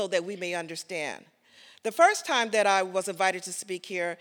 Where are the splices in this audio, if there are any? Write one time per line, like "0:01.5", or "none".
none